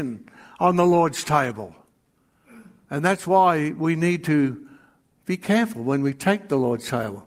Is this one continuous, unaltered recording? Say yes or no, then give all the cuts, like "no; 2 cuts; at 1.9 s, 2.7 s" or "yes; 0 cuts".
yes; 0 cuts